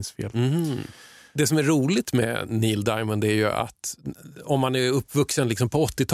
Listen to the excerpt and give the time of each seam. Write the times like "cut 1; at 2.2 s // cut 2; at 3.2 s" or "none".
none